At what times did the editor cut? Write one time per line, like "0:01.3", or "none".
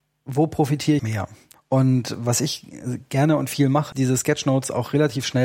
0:01.0
0:01.5
0:03.9